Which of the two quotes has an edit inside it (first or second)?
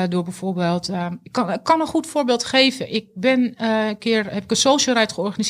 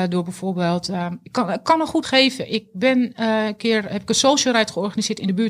second